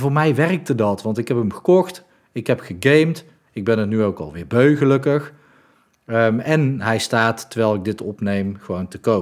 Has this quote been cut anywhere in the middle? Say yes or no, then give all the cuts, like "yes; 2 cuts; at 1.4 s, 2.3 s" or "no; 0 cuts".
no; 0 cuts